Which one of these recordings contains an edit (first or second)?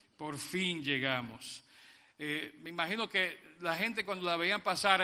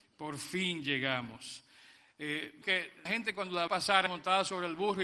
second